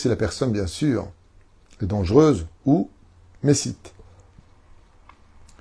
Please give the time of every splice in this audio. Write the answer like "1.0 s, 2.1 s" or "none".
none